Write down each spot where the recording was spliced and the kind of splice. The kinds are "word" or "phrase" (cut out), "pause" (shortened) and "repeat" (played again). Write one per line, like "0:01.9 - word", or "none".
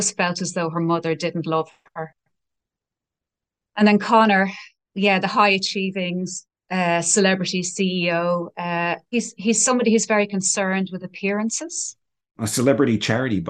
0:09.0 - pause